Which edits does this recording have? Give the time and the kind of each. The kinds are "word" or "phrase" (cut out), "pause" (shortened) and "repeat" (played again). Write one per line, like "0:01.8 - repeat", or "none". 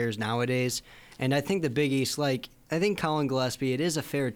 none